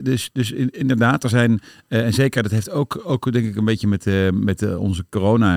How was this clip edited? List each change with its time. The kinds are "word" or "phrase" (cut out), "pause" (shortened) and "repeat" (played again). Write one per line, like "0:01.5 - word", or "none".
none